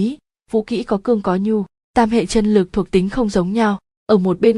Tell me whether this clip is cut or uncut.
uncut